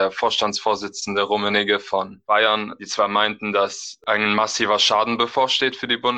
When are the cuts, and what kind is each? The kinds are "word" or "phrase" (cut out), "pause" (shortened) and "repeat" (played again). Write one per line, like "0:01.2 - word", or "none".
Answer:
none